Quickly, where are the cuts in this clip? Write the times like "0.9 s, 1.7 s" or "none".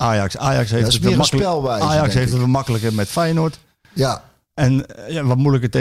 none